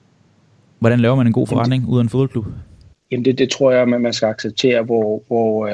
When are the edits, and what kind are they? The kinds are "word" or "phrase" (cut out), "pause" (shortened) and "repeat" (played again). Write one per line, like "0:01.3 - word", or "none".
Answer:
0:02.9 - pause